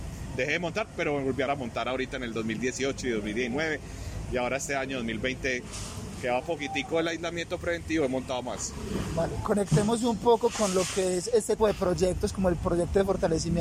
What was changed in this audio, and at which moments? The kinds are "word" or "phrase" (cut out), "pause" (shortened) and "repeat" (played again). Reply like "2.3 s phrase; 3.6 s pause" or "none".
1.5 s word; 6.4 s word; 11.6 s word